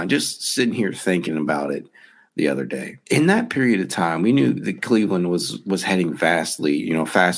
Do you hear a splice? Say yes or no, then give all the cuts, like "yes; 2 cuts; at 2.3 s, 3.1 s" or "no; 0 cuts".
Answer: yes; 1 cut; at 3.0 s